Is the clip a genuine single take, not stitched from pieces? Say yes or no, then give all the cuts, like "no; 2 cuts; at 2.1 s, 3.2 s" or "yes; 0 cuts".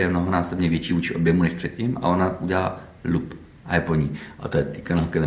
yes; 0 cuts